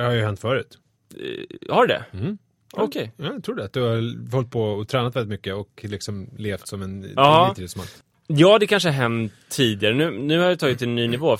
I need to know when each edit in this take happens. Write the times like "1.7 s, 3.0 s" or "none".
none